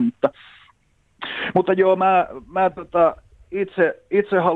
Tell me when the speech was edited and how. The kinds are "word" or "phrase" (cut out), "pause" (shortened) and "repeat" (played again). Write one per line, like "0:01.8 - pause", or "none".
none